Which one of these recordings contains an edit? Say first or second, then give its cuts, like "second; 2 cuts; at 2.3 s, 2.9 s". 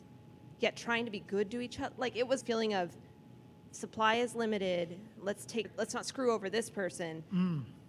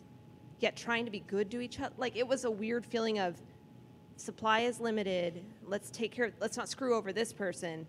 first; 2 cuts; at 2.4 s, 5.6 s